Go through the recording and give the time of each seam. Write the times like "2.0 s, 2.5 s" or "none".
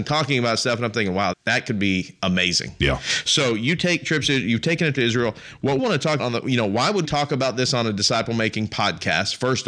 1.3 s, 4.9 s, 5.8 s, 6.2 s, 7.0 s